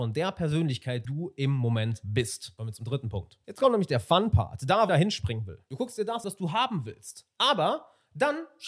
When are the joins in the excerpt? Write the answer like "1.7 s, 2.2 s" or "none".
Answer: 1.0 s, 4.9 s, 6.2 s